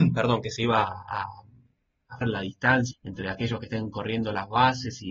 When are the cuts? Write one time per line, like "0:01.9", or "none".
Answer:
0:02.2
0:02.9

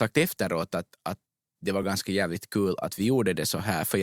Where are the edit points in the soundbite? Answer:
none

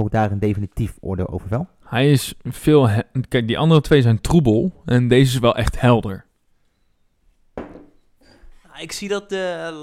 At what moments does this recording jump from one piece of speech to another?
none

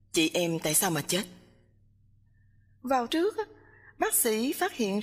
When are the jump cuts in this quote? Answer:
0:03.1

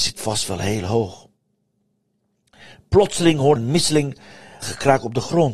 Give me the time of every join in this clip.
0:03.6
0:04.6

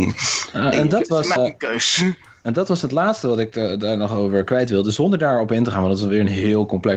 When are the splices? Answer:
0:01.4

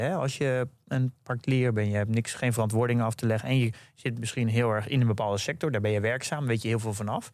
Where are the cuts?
0:01.2

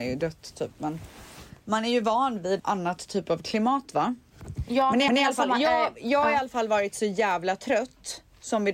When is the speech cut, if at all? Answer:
0:02.6
0:05.1

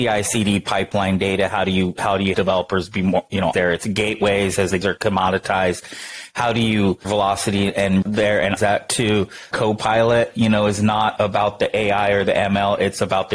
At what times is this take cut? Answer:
0:02.3
0:03.5
0:04.8
0:07.0
0:08.0
0:08.6
0:09.5
0:11.2

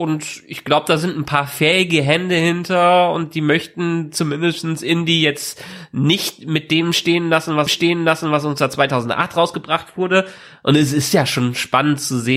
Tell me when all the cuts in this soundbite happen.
0:07.7

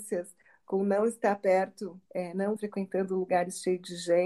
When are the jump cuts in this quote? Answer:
0:02.1
0:02.6

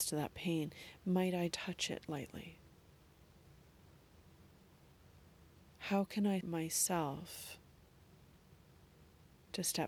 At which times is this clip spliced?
0:01.5
0:06.4

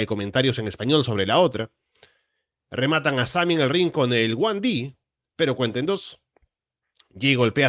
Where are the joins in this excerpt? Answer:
none

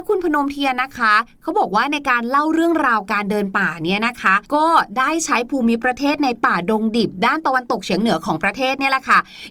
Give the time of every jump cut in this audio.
0:04.4

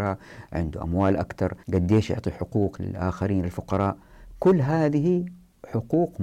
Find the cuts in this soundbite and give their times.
0:01.6

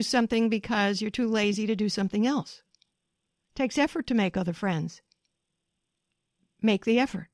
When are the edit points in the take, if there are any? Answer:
none

